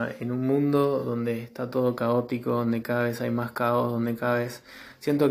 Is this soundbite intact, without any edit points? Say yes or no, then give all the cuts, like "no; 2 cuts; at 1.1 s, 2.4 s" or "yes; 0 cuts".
yes; 0 cuts